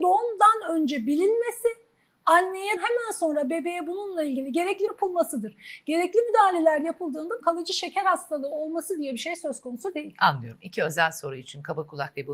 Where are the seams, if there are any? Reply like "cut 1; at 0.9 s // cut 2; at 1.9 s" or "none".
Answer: cut 1; at 2.8 s // cut 2; at 4.9 s // cut 3; at 7.4 s